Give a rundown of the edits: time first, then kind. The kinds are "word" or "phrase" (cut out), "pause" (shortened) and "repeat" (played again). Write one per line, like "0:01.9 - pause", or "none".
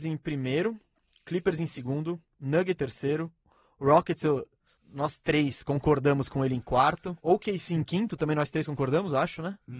0:02.8 - word
0:04.8 - word
0:07.2 - pause